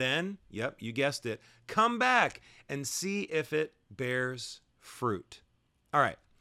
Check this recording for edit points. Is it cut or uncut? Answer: uncut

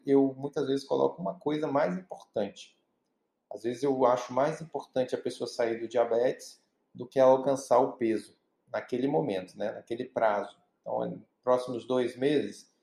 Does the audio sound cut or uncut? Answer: uncut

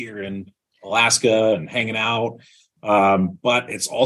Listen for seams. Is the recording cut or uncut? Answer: uncut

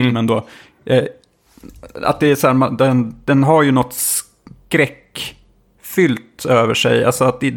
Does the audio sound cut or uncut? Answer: uncut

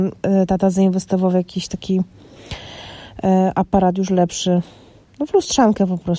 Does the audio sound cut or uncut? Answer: uncut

